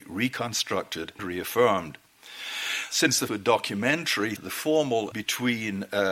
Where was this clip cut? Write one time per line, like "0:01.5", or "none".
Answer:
0:01.2
0:03.3
0:04.4
0:05.1

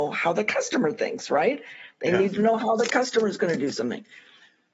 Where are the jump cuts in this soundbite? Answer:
none

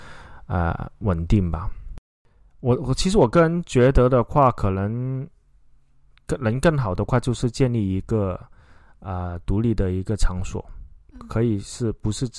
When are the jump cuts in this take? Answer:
none

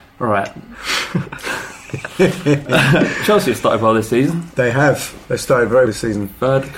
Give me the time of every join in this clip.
0:05.9

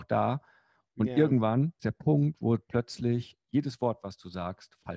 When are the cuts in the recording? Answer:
0:01.8

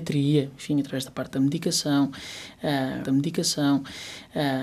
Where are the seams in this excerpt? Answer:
0:03.0

